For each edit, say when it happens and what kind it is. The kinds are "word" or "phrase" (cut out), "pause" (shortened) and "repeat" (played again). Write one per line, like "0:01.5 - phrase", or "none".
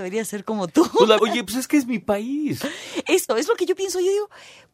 0:01.2 - word
0:03.3 - word